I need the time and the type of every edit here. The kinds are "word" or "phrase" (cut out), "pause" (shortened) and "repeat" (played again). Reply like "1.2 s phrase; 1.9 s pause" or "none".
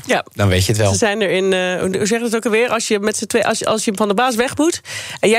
none

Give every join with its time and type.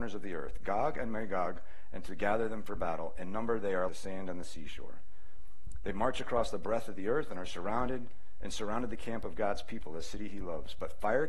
3.9 s word

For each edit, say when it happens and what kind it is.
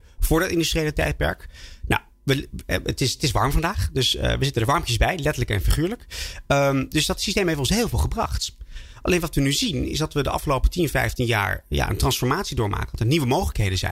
none

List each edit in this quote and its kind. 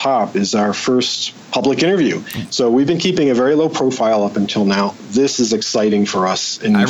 none

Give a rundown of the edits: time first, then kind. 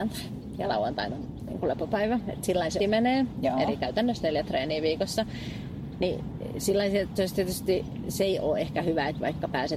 2.8 s word

